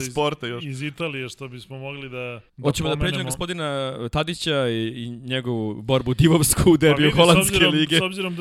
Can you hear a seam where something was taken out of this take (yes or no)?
yes